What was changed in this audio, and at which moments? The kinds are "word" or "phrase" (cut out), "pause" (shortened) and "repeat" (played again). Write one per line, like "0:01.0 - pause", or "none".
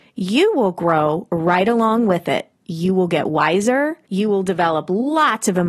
0:02.5 - pause
0:04.0 - pause